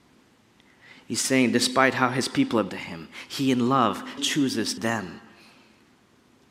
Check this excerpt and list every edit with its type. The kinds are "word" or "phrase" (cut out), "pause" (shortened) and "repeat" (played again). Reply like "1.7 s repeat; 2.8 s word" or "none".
2.7 s phrase; 4.2 s word; 4.8 s phrase

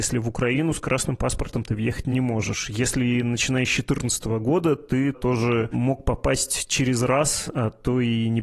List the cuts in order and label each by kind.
5.1 s word

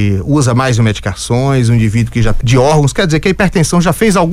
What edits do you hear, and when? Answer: 2.4 s word

